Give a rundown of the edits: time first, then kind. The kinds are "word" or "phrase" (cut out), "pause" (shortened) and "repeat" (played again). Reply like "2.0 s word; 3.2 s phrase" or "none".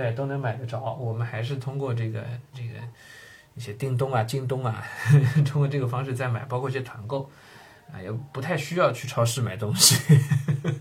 2.5 s word